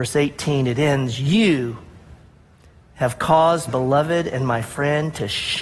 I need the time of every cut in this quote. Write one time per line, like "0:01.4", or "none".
0:03.7